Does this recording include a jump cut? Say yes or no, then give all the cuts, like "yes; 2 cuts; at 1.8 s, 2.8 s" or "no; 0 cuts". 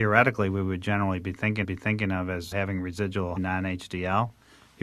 yes; 3 cuts; at 1.6 s, 2.5 s, 3.4 s